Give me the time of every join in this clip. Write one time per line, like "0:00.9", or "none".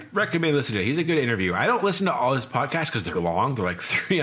0:03.1